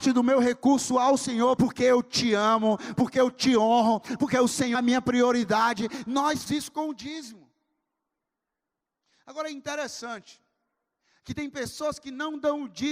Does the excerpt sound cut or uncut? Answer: cut